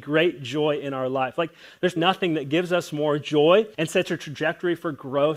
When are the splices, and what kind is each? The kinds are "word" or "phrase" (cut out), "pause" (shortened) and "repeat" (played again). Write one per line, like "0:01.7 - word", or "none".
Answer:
0:02.0 - word
0:03.7 - pause